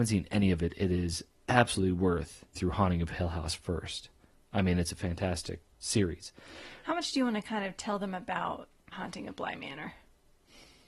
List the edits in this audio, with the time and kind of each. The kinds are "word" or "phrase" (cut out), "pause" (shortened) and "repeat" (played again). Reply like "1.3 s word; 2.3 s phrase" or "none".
2.5 s word; 5.6 s word; 8.9 s word